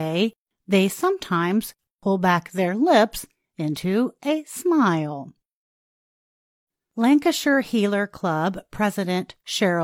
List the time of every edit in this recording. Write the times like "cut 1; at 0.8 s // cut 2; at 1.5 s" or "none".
none

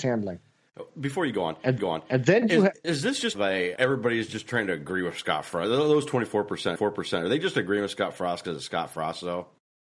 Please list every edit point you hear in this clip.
cut 1; at 1.8 s // cut 2; at 2.8 s // cut 3; at 3.3 s // cut 4; at 3.8 s // cut 5; at 6.8 s

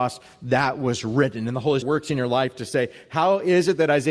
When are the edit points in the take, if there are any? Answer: cut 1; at 1.8 s

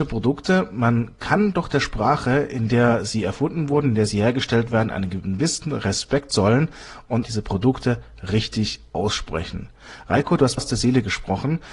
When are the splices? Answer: cut 1; at 7.2 s // cut 2; at 10.6 s

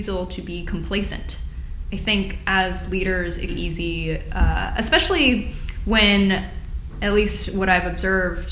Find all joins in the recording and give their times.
cut 1; at 3.5 s

